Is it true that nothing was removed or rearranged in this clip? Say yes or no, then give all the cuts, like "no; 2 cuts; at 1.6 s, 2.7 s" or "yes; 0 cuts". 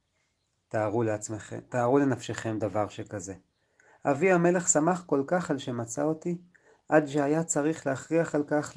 yes; 0 cuts